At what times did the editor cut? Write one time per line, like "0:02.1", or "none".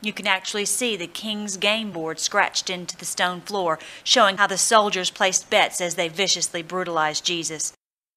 none

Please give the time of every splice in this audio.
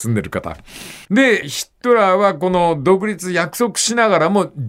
0:01.0

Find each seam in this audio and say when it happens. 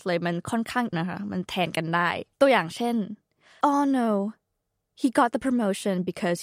0:00.9
0:02.3
0:03.6

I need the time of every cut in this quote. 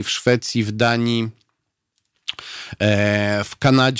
none

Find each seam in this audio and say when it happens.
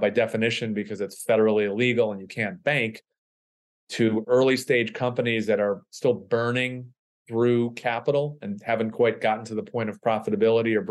none

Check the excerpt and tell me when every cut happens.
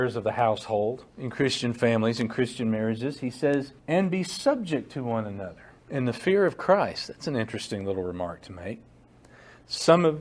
0:01.1
0:03.8
0:05.8

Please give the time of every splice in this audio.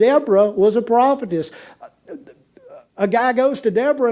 0:02.9

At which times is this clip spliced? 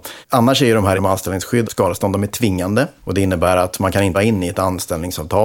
0:00.9
0:01.6
0:03.0
0:04.1

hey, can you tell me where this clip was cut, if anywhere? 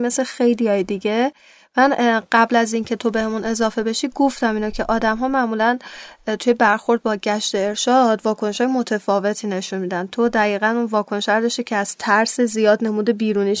none

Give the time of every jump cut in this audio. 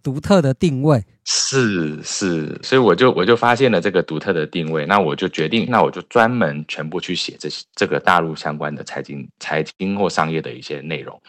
0:02.6
0:05.7

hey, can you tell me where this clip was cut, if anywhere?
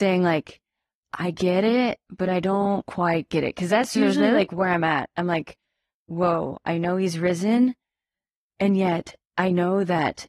none

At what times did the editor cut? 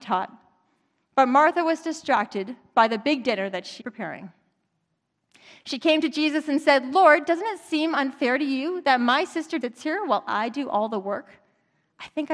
0:03.8
0:09.6

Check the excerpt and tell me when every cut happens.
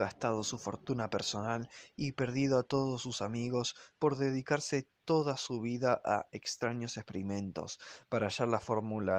none

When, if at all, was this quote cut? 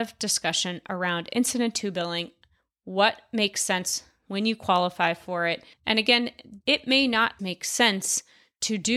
0:05.7
0:06.6
0:07.4

